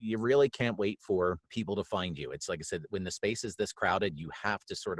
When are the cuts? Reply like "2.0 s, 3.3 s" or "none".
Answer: 1.4 s

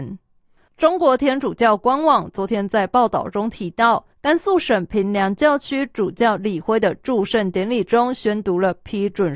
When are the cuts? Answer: 4.1 s

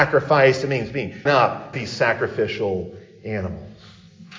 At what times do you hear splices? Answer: 1.3 s, 1.7 s

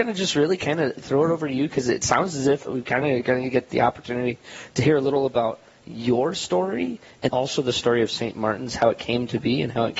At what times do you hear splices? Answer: 2.7 s, 7.3 s

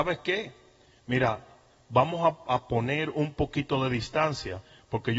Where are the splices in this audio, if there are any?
none

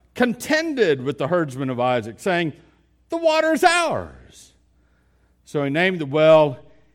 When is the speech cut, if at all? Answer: none

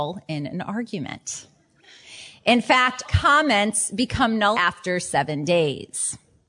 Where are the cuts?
3.0 s, 4.5 s

